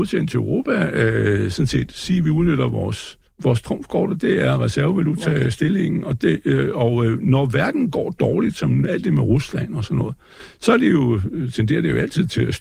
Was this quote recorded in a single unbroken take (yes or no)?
no